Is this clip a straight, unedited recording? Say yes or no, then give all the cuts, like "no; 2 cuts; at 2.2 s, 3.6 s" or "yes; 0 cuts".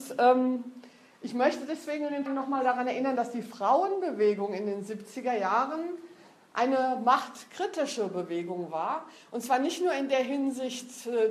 no; 1 cut; at 2.3 s